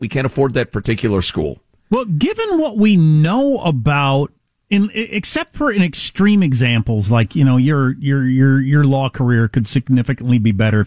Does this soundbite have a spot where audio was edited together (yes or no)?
no